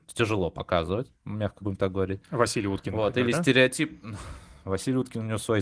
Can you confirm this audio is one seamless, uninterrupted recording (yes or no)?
no